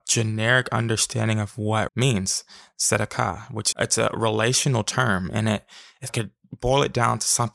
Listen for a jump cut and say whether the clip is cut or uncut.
cut